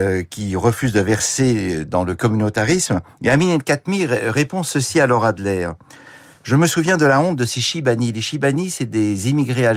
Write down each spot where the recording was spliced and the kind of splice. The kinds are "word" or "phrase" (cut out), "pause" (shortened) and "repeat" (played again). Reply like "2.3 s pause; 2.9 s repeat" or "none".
none